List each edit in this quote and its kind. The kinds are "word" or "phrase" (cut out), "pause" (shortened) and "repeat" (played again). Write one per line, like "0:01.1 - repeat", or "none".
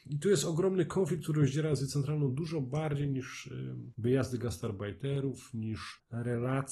none